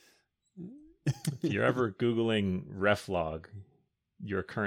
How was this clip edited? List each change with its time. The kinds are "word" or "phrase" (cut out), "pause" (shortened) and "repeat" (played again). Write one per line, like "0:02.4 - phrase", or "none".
none

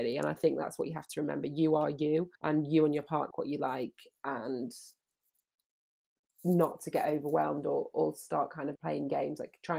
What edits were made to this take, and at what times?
0:02.3 - pause
0:03.3 - word
0:08.8 - word

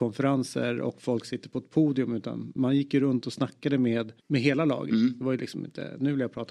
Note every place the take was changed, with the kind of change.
0:04.2 - pause

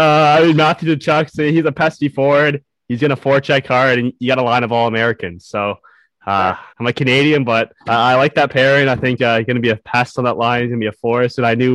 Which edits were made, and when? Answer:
0:06.7 - pause
0:07.8 - pause
0:09.2 - word

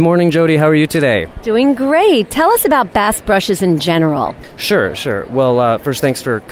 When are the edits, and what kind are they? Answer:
none

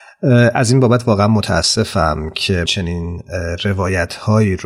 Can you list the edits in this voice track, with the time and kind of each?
0:02.7 - phrase

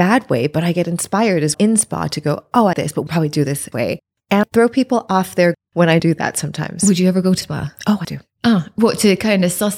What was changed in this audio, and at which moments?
0:01.5 - word
0:02.7 - word
0:03.1 - word
0:03.7 - word
0:04.4 - word
0:05.5 - word
0:06.0 - word
0:07.4 - word
0:08.0 - word

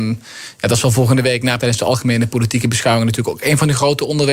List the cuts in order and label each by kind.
0:01.6 - word

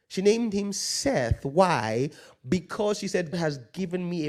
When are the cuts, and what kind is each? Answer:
0:03.3 - word

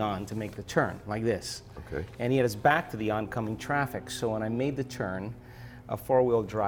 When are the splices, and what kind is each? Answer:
none

